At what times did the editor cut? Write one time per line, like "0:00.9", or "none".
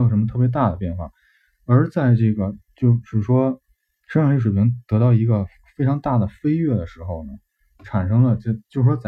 none